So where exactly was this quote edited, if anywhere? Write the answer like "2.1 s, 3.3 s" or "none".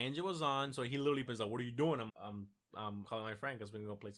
1.3 s, 2.1 s, 3.0 s